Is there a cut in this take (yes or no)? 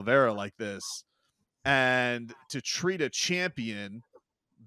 no